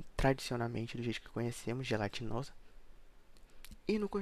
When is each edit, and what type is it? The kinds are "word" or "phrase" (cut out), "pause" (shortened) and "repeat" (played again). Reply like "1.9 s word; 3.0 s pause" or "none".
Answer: none